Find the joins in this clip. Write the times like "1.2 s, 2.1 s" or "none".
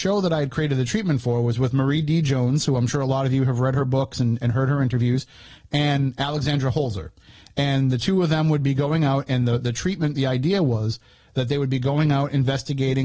none